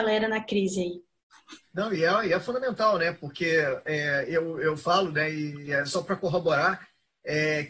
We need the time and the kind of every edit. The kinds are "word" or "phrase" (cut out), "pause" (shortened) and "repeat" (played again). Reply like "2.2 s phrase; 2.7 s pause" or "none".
none